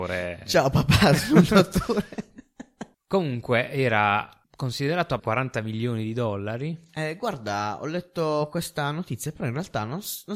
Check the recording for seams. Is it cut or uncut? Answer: cut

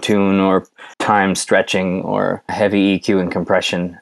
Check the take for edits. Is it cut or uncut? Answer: cut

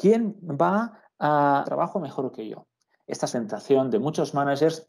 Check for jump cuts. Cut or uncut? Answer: cut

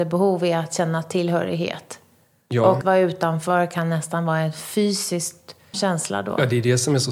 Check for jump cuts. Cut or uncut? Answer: cut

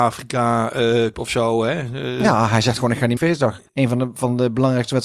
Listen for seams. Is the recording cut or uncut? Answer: cut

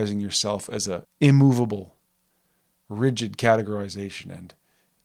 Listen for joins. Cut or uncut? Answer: cut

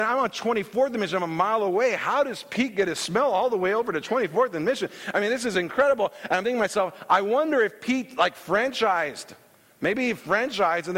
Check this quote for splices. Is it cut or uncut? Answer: uncut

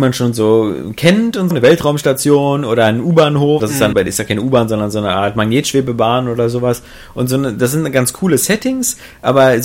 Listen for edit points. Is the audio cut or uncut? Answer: cut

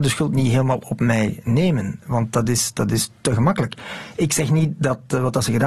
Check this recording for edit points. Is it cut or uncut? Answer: uncut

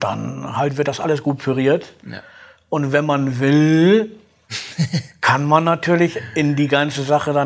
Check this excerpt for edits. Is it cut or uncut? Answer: uncut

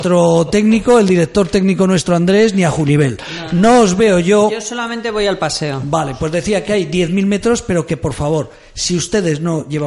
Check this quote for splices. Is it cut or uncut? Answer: uncut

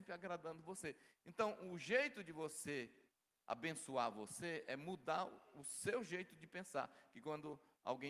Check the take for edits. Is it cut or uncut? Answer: uncut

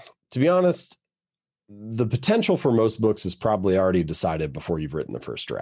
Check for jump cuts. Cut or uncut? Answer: uncut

